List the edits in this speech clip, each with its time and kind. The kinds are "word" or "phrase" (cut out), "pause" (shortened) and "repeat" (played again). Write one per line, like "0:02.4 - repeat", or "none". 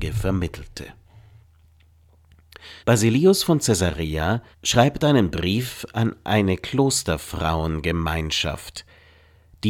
0:02.8 - pause
0:04.5 - pause